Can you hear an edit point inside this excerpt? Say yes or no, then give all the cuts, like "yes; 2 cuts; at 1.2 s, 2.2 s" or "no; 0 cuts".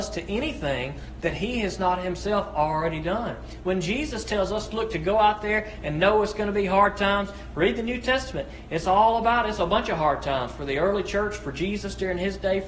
no; 0 cuts